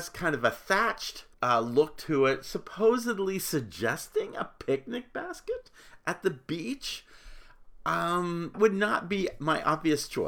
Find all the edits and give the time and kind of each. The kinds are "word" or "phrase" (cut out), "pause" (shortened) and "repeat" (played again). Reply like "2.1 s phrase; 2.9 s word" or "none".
1.3 s pause; 8.5 s word